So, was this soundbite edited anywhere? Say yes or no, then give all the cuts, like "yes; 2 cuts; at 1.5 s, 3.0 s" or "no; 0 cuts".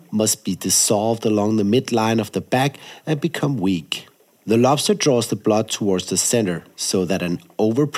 no; 0 cuts